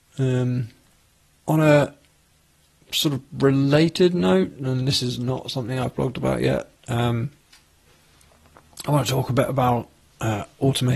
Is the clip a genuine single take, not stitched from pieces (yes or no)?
yes